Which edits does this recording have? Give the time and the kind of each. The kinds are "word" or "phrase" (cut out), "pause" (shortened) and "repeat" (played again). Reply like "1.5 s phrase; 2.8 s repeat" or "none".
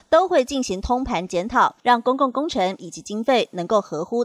1.8 s pause